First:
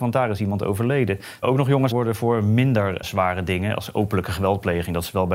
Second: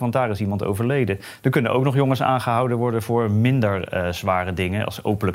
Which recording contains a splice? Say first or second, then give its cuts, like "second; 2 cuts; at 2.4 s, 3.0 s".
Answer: first; 3 cuts; at 1.4 s, 1.9 s, 3.0 s